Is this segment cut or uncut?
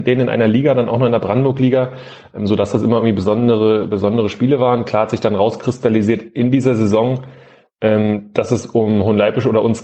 uncut